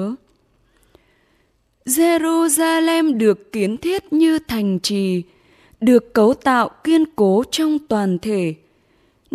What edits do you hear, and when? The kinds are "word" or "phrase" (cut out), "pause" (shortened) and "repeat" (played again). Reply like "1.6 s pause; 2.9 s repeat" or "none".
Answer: none